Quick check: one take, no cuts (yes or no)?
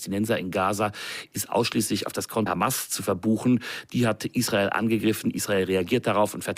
no